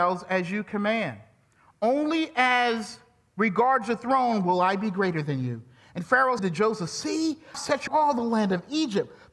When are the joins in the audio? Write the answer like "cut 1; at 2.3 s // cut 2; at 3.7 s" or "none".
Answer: cut 1; at 6.4 s // cut 2; at 7.5 s // cut 3; at 7.9 s

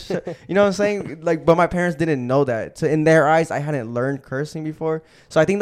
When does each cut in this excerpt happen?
none

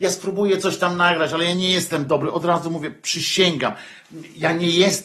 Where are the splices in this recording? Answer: none

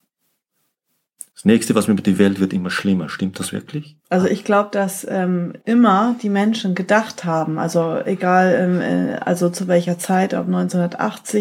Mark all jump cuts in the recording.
cut 1; at 1.3 s // cut 2; at 4.0 s // cut 3; at 5.6 s

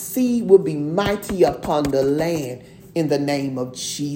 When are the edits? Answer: none

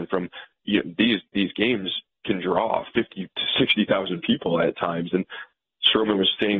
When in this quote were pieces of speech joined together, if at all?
none

